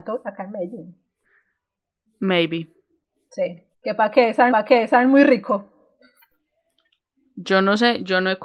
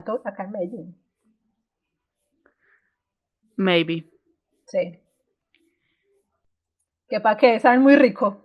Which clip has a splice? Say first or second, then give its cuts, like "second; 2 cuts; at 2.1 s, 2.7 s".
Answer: first; 3 cuts; at 1.2 s, 3.7 s, 4.5 s